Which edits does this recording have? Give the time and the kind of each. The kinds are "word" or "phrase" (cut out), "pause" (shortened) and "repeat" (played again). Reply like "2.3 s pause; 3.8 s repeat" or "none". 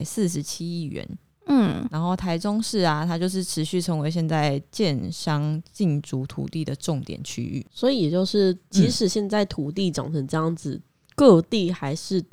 none